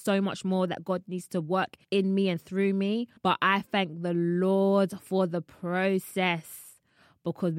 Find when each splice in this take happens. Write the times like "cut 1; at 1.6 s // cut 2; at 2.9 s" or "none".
cut 1; at 1.8 s // cut 2; at 3.2 s